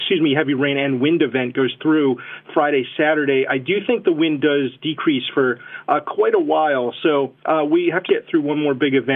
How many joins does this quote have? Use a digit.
2